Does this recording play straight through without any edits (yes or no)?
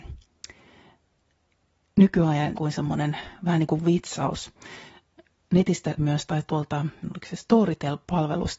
no